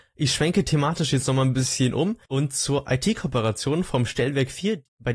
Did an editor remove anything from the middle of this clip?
yes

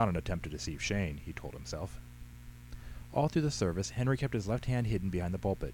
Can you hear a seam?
no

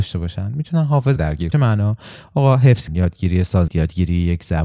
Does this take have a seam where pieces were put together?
yes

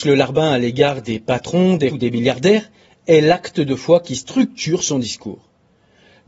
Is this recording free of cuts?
no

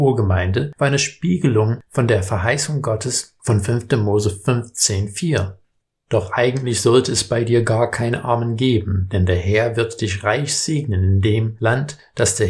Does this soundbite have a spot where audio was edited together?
yes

